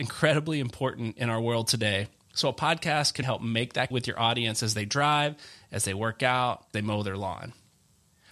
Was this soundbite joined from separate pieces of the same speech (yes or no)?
yes